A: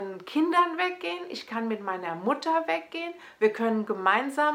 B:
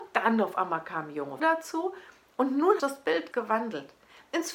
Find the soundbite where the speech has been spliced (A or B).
B